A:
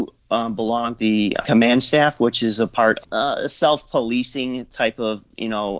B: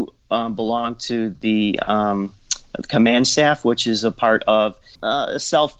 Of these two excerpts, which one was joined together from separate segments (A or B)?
A